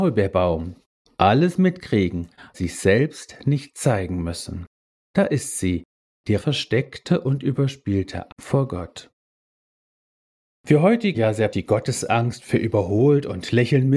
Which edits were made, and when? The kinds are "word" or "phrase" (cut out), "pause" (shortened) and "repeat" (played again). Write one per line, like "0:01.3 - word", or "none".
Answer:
0:02.5 - word
0:06.4 - word
0:08.3 - word
0:11.1 - word
0:11.5 - word